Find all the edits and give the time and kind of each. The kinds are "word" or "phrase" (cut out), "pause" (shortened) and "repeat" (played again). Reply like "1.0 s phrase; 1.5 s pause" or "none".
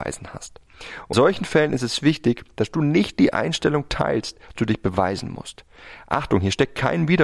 1.1 s word; 4.6 s word